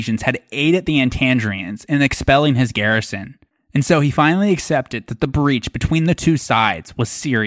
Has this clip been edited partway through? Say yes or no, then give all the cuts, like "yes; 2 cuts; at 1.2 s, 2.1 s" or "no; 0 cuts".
no; 0 cuts